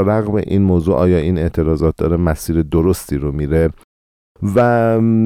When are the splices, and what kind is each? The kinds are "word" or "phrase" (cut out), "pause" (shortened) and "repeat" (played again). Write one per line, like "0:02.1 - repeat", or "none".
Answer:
none